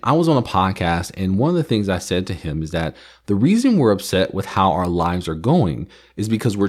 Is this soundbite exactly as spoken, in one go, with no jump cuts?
yes; 0 cuts

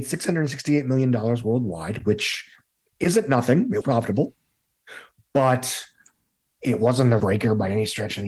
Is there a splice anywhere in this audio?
yes; 2 cuts; at 3.8 s, 7.2 s

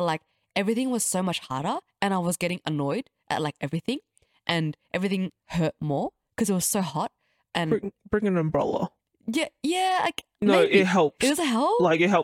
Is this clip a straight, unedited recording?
yes; 0 cuts

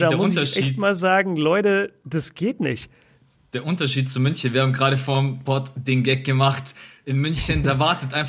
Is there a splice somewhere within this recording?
no; 0 cuts

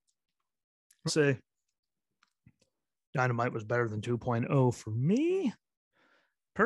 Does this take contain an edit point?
yes; 1 cut; at 1.1 s

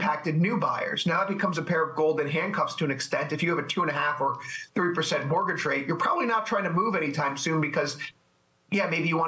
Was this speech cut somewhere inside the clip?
no; 0 cuts

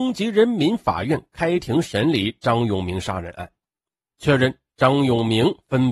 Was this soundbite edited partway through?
no; 0 cuts

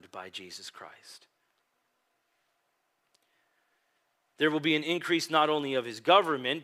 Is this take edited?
no; 0 cuts

